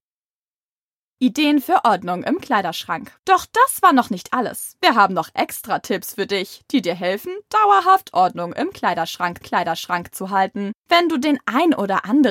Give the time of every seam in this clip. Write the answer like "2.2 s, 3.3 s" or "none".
3.2 s, 9.4 s, 10.8 s